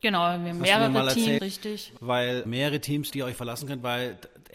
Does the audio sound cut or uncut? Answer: cut